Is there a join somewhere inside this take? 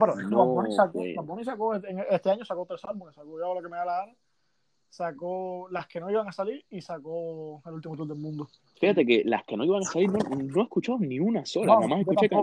no; 0 cuts

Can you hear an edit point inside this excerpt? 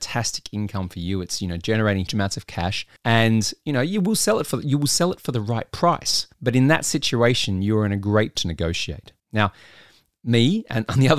yes; 5 cuts; at 2.1 s, 3.0 s, 6.3 s, 8.4 s, 9.2 s

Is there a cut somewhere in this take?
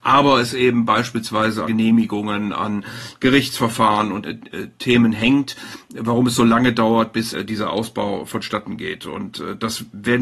yes; 3 cuts; at 1.6 s, 4.2 s, 7.3 s

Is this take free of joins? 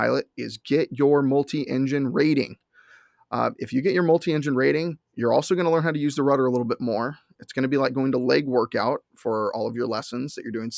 no; 1 cut; at 5.0 s

